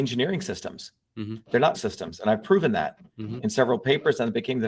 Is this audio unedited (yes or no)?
no